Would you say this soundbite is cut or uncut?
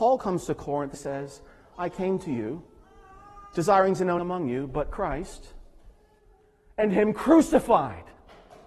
cut